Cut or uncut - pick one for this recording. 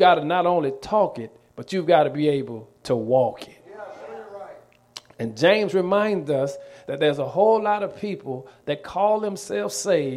uncut